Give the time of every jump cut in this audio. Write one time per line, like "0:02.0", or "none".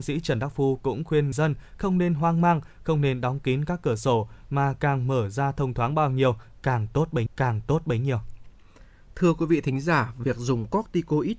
0:01.3
0:07.3